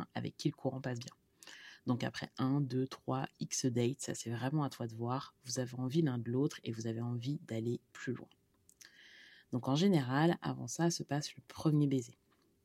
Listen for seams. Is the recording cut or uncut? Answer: uncut